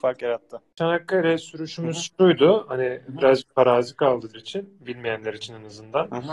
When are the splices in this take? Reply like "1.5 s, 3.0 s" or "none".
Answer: 4.3 s

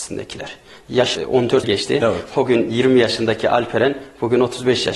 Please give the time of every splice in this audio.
1.2 s, 1.6 s

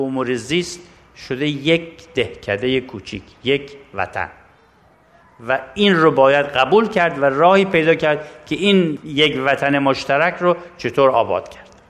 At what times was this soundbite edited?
none

